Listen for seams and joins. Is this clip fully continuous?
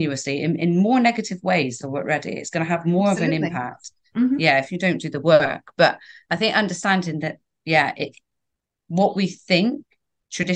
no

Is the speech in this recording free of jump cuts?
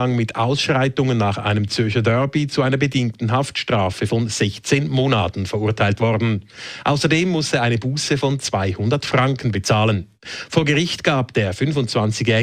yes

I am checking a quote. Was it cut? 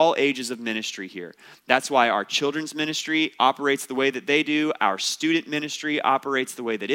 no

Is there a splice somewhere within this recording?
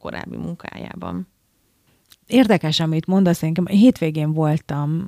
no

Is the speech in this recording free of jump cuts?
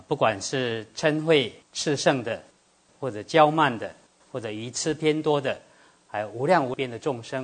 yes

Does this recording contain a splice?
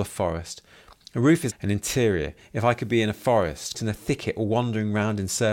yes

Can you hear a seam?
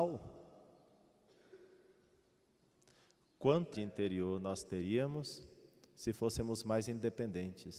yes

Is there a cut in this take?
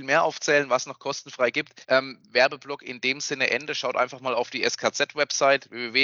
yes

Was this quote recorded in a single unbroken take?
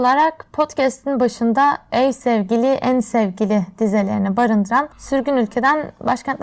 yes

